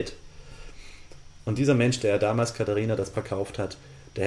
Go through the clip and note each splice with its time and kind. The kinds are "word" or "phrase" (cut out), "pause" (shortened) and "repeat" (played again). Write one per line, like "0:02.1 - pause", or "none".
0:03.1 - word